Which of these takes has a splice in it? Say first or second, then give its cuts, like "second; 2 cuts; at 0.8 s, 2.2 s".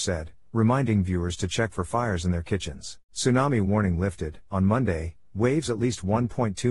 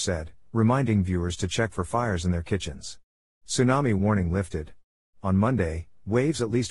first; 2 cuts; at 3.0 s, 4.5 s